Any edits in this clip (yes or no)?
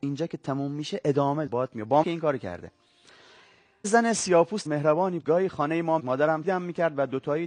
yes